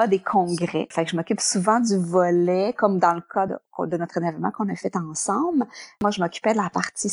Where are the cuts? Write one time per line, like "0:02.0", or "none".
none